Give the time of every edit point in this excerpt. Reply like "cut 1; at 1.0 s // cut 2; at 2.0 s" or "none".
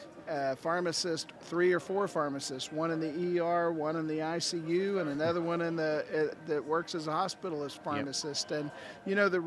cut 1; at 6.3 s